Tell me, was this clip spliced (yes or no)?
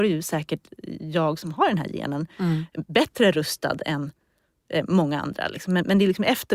no